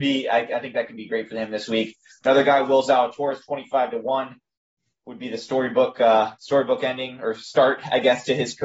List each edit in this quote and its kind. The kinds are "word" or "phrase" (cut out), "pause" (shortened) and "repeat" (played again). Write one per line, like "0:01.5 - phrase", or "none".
none